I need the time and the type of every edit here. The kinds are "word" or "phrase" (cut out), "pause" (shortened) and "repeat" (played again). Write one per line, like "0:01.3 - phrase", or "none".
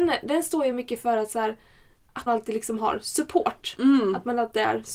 0:02.3 - phrase